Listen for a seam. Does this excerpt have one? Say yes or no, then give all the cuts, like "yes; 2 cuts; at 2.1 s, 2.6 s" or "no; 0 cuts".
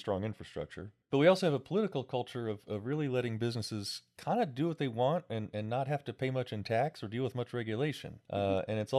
yes; 1 cut; at 1.0 s